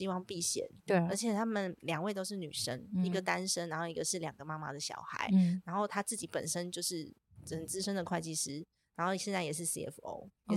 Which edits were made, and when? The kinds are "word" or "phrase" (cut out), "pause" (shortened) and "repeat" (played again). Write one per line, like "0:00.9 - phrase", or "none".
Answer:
none